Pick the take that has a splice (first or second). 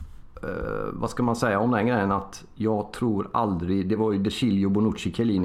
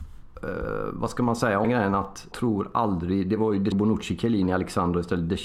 second